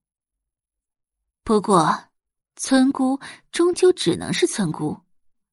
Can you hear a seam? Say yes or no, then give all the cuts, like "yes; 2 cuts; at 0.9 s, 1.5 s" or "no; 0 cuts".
no; 0 cuts